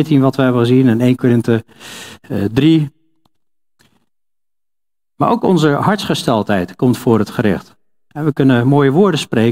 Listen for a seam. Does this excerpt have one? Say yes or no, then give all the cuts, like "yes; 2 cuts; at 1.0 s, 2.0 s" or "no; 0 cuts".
no; 0 cuts